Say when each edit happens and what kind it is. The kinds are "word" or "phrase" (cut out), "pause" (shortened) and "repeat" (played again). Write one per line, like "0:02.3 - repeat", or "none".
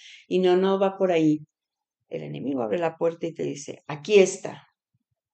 none